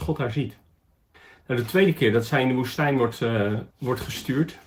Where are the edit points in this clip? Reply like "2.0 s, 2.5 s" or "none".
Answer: 1.1 s, 3.7 s